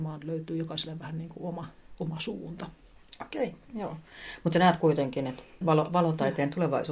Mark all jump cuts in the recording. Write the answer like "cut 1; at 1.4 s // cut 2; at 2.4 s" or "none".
cut 1; at 5.6 s